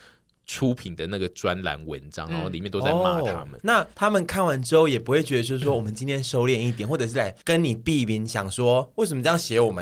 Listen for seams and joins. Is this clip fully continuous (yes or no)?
no